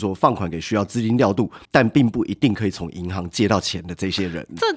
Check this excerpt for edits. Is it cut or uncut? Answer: cut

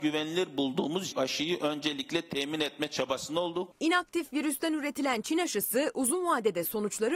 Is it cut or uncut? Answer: cut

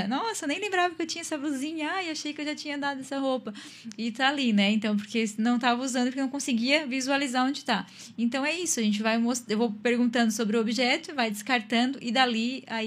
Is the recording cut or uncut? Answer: uncut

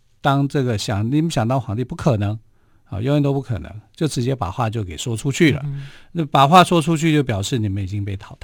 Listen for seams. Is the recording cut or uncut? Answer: uncut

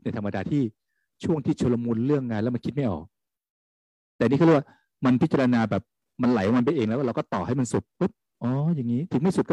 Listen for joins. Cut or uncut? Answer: uncut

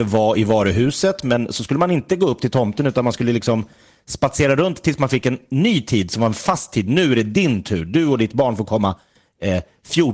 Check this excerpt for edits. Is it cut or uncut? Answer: uncut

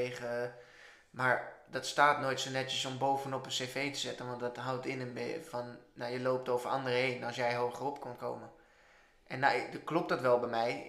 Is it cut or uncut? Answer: uncut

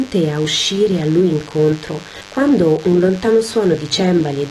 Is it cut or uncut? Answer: uncut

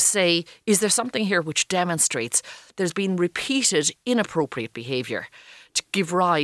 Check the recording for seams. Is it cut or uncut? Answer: uncut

